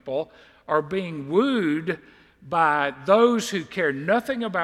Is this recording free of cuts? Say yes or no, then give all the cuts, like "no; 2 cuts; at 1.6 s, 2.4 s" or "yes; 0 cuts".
yes; 0 cuts